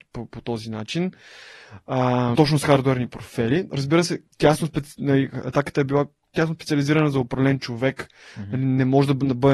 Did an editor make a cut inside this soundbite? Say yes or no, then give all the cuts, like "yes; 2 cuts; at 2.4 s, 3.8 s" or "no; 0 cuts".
yes; 2 cuts; at 2.3 s, 4.3 s